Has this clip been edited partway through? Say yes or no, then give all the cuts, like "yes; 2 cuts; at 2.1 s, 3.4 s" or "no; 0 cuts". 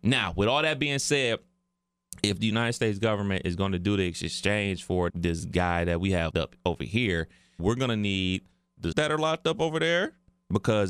yes; 4 cuts; at 5.1 s, 6.3 s, 7.6 s, 8.9 s